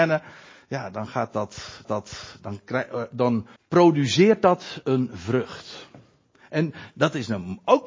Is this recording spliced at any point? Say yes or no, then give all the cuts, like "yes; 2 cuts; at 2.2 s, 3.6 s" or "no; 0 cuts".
yes; 2 cuts; at 1.8 s, 3.6 s